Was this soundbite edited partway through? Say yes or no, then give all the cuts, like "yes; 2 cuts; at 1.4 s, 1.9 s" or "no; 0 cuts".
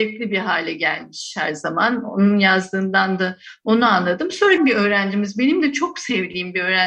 yes; 1 cut; at 4.6 s